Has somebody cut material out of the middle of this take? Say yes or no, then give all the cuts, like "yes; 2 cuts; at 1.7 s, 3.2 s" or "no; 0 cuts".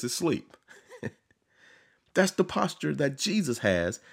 no; 0 cuts